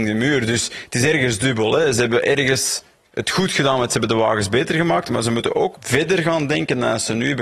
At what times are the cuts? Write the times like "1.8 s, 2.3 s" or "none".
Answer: 5.7 s